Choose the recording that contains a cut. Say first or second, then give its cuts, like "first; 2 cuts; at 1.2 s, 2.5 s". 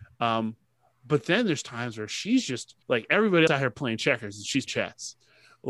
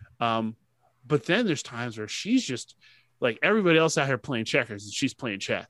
first; 3 cuts; at 2.8 s, 3.5 s, 4.7 s